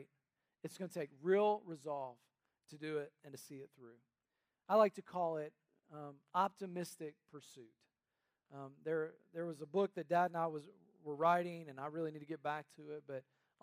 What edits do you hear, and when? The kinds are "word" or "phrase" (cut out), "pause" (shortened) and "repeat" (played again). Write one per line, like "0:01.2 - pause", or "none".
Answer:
none